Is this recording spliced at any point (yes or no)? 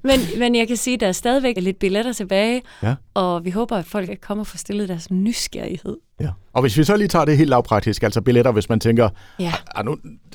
yes